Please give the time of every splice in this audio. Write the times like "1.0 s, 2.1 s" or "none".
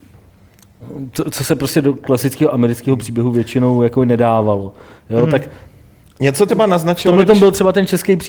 6.5 s

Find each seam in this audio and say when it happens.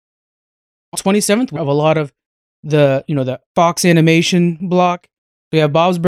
0.9 s, 1.6 s, 3.5 s

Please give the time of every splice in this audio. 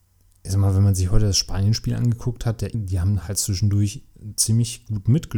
2.7 s

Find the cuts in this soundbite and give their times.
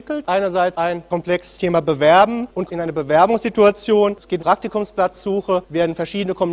1.6 s, 2.7 s, 4.4 s

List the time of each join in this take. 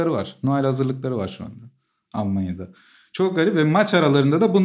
none

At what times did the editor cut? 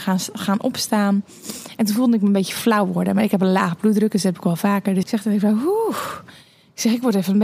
5.0 s

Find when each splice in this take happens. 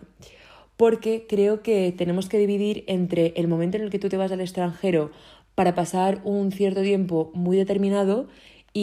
none

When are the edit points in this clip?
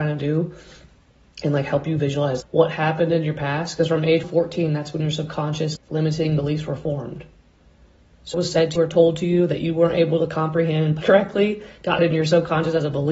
2.4 s, 4.2 s, 5.8 s, 8.3 s, 8.8 s, 11.0 s, 12.0 s

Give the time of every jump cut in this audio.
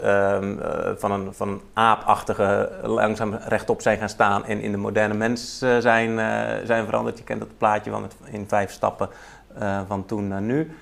none

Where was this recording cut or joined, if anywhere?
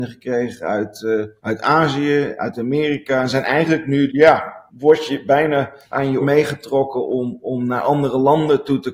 1.4 s, 4.1 s, 4.7 s, 5.8 s, 6.2 s

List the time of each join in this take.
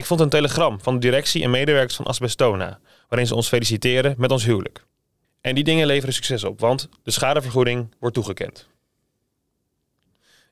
5.2 s

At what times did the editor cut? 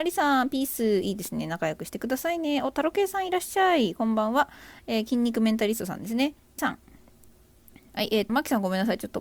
6.6 s, 8.3 s

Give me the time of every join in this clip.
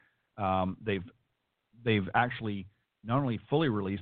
none

